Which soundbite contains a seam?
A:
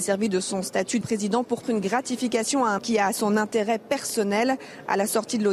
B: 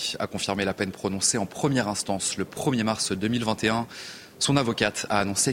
A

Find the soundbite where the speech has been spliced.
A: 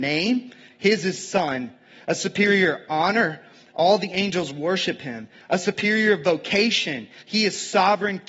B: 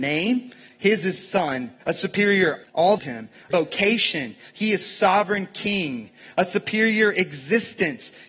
B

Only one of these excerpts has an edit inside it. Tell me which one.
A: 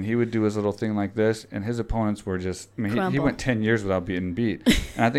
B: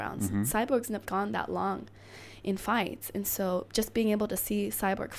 B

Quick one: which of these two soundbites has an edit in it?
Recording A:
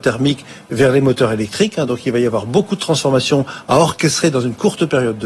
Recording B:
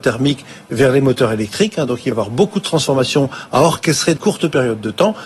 B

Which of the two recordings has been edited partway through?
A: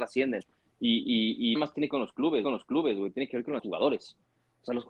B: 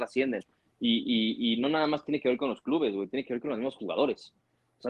A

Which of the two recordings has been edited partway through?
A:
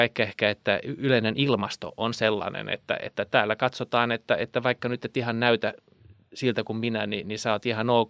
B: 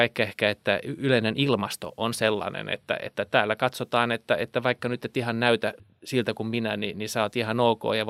B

